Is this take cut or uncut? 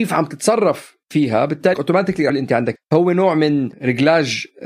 cut